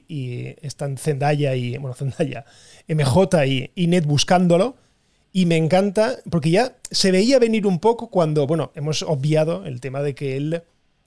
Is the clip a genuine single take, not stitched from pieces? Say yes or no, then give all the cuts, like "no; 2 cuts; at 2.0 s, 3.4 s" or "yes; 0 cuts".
yes; 0 cuts